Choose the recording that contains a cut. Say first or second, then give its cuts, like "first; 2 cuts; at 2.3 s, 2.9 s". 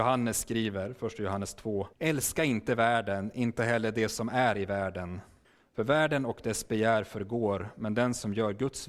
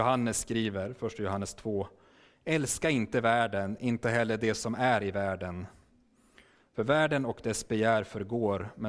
first; 2 cuts; at 1.9 s, 5.4 s